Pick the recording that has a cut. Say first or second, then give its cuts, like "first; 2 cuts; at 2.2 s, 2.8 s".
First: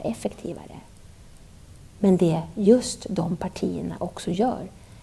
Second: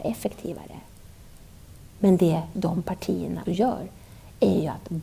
second; 2 cuts; at 2.5 s, 3.5 s